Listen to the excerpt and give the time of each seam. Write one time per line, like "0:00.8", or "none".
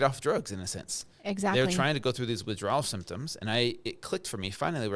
none